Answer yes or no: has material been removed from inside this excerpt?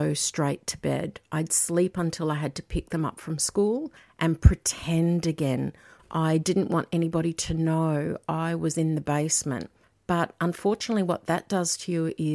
no